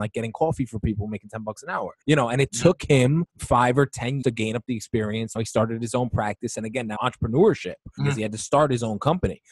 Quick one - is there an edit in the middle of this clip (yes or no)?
yes